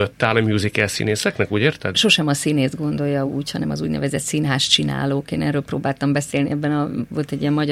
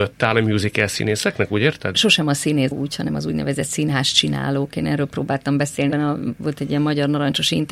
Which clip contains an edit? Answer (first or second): second